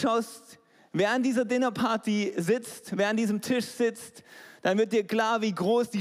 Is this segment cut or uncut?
uncut